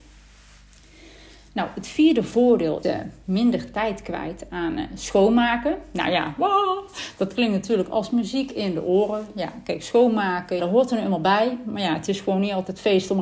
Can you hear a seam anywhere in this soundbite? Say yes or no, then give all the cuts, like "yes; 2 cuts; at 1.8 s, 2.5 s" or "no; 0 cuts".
yes; 2 cuts; at 2.8 s, 10.6 s